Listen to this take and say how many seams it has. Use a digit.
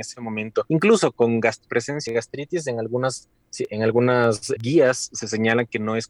3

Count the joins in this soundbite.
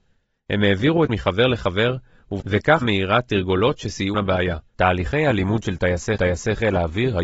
5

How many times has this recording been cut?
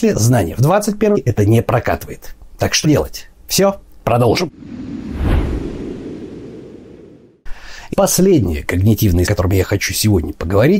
5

